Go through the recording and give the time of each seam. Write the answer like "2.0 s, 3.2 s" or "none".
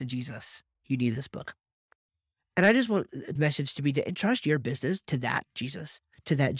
3.4 s

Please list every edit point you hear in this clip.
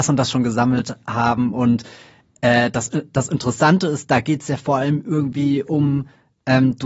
none

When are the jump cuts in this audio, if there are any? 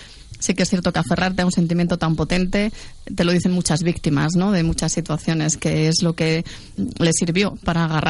6.8 s

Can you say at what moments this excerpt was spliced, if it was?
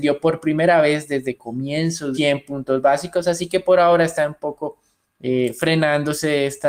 2.1 s

